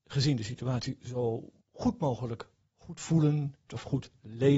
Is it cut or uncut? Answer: cut